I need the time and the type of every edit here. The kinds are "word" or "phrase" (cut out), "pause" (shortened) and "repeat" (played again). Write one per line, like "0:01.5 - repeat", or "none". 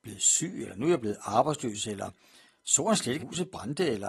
0:03.2 - word